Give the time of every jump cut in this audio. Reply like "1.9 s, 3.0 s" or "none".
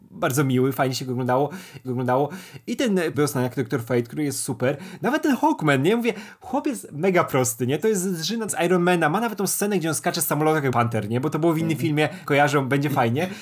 1.8 s, 3.1 s, 8.5 s, 10.7 s, 12.3 s